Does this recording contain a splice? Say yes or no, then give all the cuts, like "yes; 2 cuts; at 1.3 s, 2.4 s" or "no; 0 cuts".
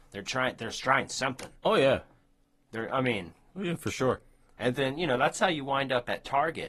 no; 0 cuts